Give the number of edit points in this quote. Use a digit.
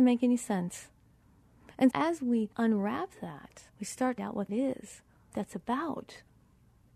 6